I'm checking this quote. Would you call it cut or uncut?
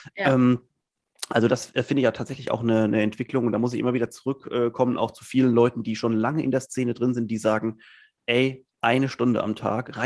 uncut